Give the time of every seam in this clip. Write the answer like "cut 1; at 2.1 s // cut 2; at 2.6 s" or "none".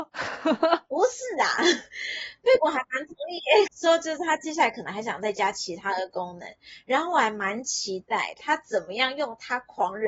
cut 1; at 3.7 s